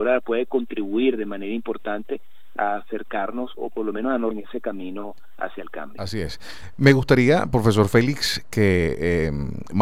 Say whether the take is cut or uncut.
cut